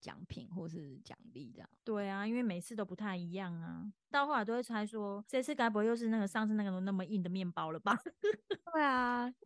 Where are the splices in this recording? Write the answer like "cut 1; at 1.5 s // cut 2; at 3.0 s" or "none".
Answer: cut 1; at 1.8 s